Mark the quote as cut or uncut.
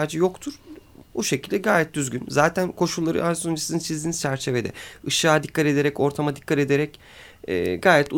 uncut